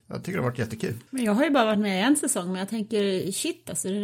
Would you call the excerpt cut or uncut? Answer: cut